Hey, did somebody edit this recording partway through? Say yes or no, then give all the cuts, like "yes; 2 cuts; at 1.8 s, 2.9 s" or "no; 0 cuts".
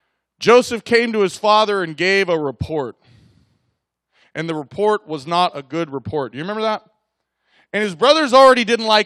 no; 0 cuts